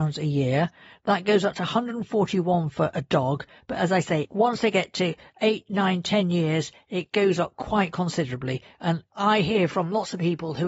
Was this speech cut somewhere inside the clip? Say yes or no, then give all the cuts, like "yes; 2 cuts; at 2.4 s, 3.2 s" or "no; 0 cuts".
no; 0 cuts